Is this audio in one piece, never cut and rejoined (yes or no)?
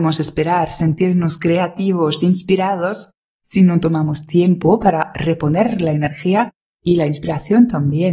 yes